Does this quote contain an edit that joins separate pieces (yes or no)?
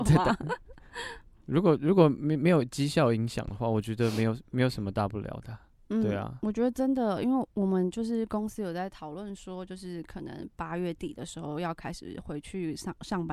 no